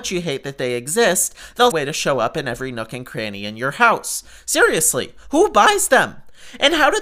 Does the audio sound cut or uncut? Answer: cut